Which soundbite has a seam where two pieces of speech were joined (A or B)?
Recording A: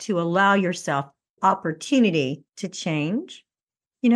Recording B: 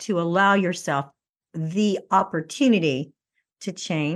A